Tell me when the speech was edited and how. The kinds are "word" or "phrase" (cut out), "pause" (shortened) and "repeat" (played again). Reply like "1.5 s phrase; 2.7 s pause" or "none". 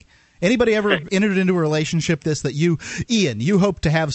1.1 s word; 2.2 s word